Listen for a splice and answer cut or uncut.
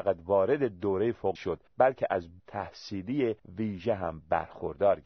cut